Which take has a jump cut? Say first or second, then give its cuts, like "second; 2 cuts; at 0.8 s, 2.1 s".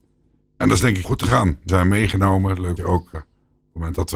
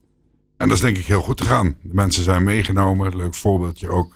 first; 4 cuts; at 1.0 s, 1.7 s, 2.8 s, 3.1 s